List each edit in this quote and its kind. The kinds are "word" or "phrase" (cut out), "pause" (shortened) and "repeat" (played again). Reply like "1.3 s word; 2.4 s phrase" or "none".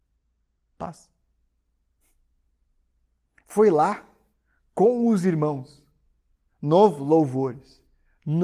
none